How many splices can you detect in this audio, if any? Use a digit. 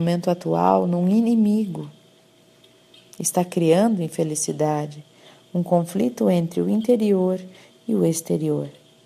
0